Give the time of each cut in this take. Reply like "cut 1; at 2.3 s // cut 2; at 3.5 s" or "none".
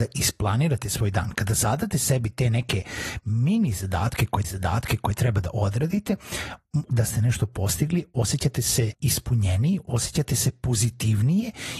cut 1; at 4.4 s // cut 2; at 6.9 s // cut 3; at 8.9 s